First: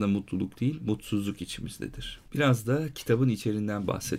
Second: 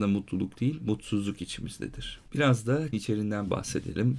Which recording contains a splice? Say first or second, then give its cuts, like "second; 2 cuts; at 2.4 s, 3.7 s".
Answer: second; 1 cut; at 2.9 s